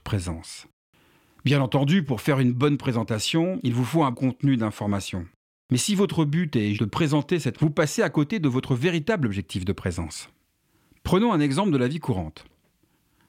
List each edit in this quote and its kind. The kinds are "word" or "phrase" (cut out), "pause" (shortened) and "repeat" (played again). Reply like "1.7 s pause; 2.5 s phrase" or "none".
4.1 s word; 6.7 s word; 7.5 s word

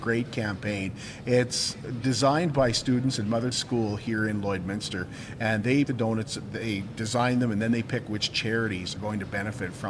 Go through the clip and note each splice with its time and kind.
3.5 s word; 5.8 s word; 9.0 s word

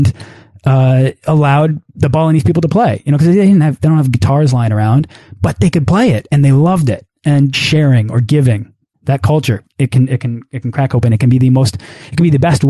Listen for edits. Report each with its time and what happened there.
1.9 s pause; 7.5 s word; 8.9 s word; 9.7 s pause

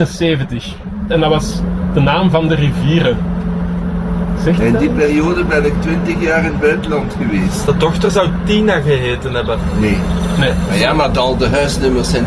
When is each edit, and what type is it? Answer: none

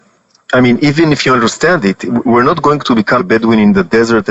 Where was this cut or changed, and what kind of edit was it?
3.2 s word

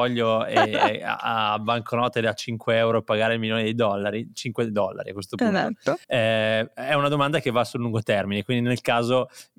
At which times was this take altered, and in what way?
6.0 s pause

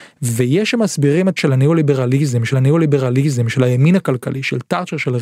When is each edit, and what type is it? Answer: 1.4 s word; 2.5 s repeat

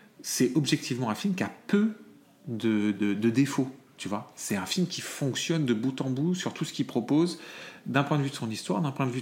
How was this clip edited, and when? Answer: 2.9 s word

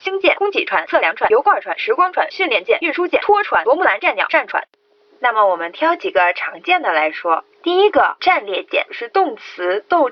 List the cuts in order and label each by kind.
8.2 s word; 8.9 s word

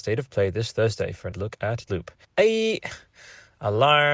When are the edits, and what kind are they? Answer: 1.3 s word; 1.9 s word; 2.2 s pause

